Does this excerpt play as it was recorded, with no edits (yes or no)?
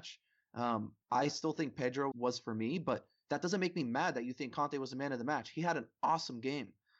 no